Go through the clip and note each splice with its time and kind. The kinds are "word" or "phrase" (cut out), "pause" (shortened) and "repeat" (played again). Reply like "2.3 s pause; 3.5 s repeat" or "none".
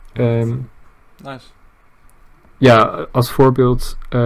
none